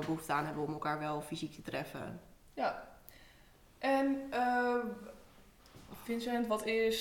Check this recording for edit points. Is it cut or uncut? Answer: uncut